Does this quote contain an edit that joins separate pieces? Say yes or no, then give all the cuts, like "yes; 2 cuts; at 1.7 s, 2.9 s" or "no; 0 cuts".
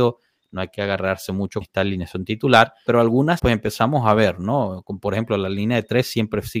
yes; 3 cuts; at 1.6 s, 2.9 s, 3.4 s